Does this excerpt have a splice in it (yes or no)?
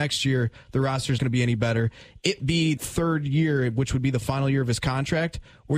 yes